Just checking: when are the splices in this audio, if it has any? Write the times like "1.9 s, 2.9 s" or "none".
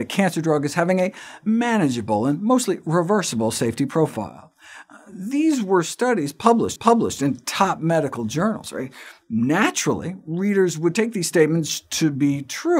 6.8 s